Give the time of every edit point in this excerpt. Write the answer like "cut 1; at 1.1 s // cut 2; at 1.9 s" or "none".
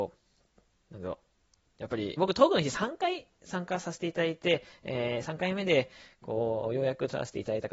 cut 1; at 2.2 s